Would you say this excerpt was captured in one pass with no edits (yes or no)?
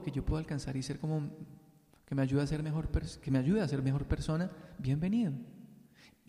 yes